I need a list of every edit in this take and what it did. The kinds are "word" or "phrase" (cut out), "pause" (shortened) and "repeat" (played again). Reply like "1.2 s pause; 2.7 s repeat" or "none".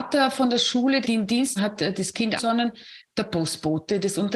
1.0 s word; 1.6 s word; 2.4 s word